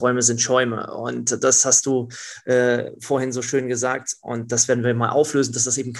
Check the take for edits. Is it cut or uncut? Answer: uncut